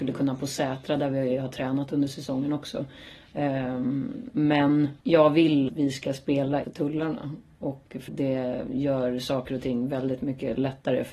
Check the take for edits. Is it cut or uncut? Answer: cut